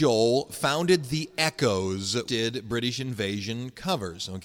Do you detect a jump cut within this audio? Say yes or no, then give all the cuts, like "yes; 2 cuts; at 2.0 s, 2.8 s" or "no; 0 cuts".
yes; 1 cut; at 2.3 s